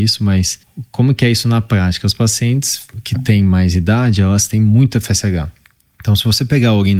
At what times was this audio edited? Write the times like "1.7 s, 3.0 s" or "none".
none